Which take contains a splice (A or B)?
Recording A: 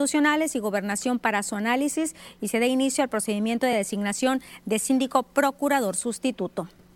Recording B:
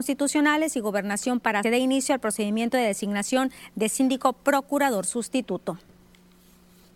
B